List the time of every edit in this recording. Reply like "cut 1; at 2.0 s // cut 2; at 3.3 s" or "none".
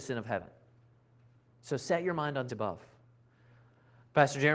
cut 1; at 2.5 s